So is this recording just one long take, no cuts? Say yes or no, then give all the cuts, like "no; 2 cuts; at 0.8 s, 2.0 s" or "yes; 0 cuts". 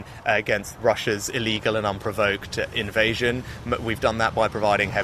yes; 0 cuts